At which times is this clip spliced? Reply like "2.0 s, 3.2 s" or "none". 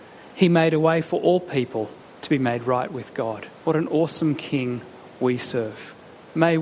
2.0 s, 3.6 s